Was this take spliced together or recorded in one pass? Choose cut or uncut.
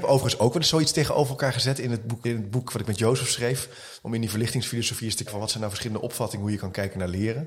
cut